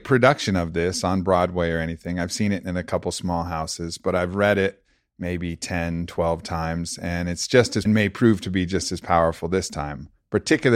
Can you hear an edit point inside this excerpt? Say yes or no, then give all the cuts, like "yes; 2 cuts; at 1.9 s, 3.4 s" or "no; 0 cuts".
yes; 1 cut; at 7.9 s